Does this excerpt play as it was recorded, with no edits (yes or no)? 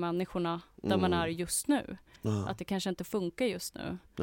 yes